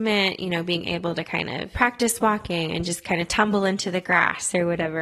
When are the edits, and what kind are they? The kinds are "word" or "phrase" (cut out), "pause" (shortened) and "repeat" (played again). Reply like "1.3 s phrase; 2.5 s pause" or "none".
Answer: none